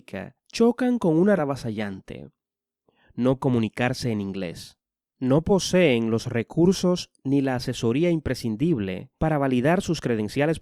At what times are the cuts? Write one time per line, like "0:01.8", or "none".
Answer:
0:01.4
0:03.4
0:09.2

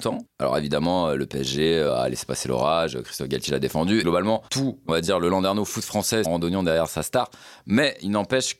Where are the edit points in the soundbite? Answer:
0:04.0
0:04.5
0:06.2

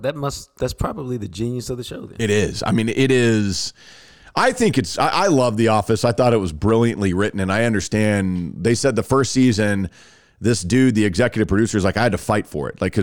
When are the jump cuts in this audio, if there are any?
none

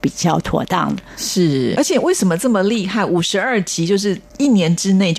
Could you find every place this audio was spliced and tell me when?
0:01.8

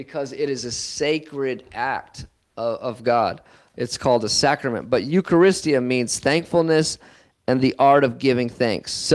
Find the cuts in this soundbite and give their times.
none

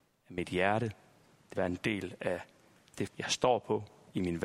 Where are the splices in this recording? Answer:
0:01.6
0:03.1

